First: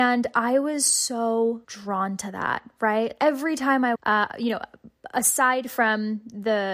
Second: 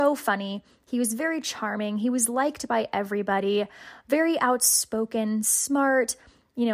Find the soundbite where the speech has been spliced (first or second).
first